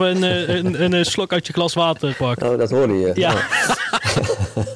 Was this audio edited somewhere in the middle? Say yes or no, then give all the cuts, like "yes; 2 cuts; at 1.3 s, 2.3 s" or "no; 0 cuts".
yes; 1 cut; at 2.1 s